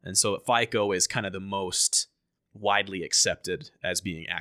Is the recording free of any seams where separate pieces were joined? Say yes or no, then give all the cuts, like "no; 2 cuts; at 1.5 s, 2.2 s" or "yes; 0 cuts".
yes; 0 cuts